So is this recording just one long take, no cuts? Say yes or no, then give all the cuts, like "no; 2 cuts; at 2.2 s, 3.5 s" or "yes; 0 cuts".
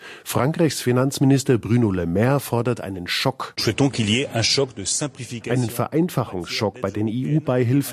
yes; 0 cuts